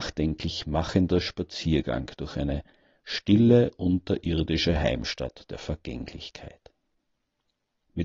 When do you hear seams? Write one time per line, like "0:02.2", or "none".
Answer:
none